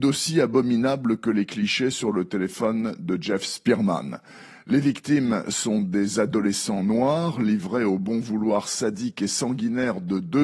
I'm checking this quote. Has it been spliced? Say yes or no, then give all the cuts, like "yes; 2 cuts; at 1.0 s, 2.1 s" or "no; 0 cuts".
no; 0 cuts